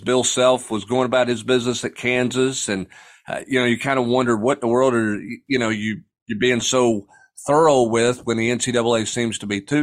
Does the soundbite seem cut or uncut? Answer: uncut